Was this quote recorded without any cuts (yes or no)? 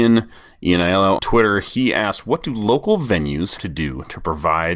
no